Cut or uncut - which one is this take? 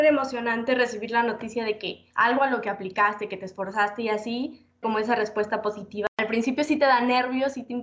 cut